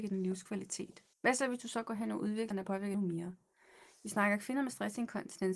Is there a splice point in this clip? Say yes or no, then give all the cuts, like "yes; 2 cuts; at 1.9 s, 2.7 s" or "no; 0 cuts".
yes; 3 cuts; at 1.1 s, 2.5 s, 2.9 s